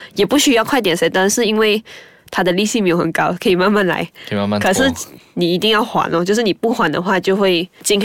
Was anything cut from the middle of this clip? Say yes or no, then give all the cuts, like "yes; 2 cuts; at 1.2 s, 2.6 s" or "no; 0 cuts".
no; 0 cuts